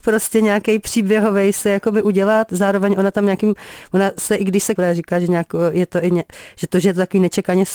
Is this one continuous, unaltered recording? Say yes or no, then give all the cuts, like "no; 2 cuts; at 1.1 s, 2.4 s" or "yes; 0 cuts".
no; 1 cut; at 4.8 s